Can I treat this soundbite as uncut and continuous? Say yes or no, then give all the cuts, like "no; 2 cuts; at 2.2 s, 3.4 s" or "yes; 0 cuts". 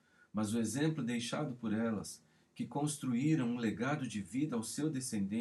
yes; 0 cuts